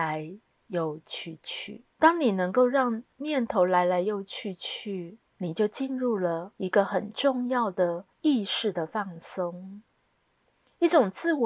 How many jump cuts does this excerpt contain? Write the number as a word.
four